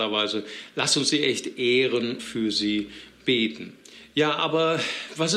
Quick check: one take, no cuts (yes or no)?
no